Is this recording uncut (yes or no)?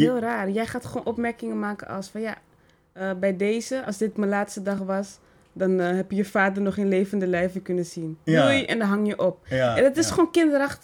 yes